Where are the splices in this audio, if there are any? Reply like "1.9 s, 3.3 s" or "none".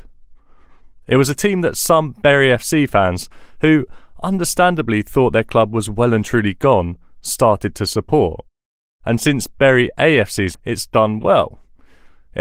10.5 s